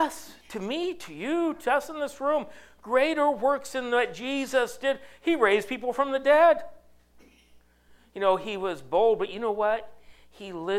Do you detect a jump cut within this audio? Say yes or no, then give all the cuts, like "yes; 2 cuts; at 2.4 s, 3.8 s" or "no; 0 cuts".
no; 0 cuts